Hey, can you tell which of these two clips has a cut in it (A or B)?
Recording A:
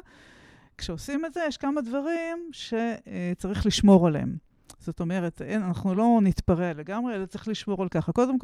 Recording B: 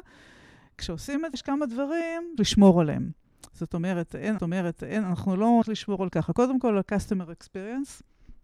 B